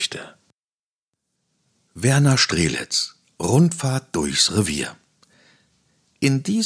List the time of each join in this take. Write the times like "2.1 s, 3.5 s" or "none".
none

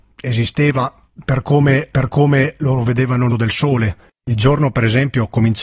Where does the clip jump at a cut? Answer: 1.9 s, 3.3 s

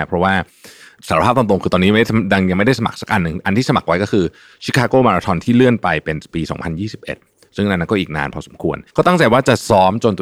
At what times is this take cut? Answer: 8.9 s

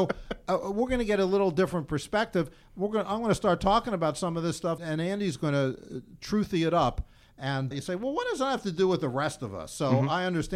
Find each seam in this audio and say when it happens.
4.8 s, 7.7 s

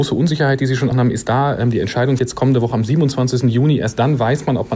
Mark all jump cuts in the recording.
0.9 s, 2.2 s, 2.7 s

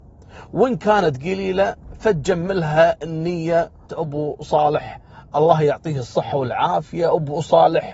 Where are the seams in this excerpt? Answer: 3.9 s

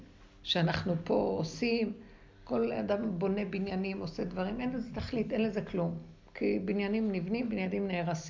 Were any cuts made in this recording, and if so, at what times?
none

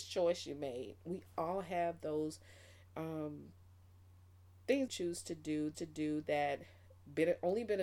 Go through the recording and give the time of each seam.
4.9 s, 5.7 s

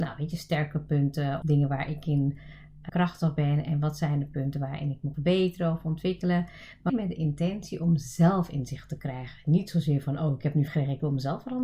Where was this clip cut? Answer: 1.4 s, 2.9 s, 5.1 s, 6.9 s, 10.7 s

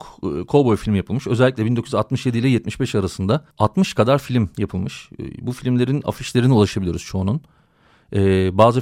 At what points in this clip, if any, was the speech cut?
3.5 s

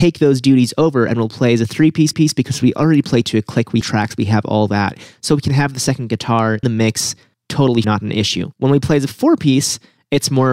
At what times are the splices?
2.1 s, 3.8 s, 6.6 s, 7.8 s, 8.5 s

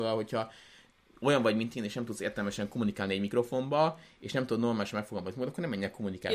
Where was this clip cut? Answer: none

